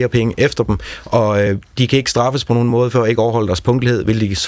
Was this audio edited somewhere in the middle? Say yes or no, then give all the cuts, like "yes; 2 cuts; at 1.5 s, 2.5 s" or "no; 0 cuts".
no; 0 cuts